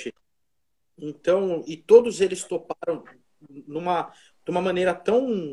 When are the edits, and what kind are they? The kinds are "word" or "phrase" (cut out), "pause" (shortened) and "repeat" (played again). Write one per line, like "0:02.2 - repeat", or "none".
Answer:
none